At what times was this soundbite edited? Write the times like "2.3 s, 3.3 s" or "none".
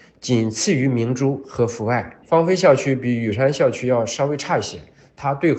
2.2 s